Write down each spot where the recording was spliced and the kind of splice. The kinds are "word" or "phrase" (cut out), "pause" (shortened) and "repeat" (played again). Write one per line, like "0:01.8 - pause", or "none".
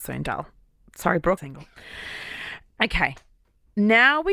0:01.4 - phrase